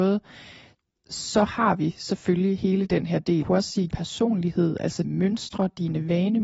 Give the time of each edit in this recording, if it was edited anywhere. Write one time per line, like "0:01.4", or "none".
0:03.4
0:03.9
0:05.0